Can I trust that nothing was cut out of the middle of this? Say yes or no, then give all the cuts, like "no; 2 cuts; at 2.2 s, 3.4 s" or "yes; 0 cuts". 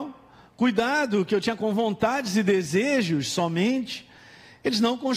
no; 1 cut; at 1.6 s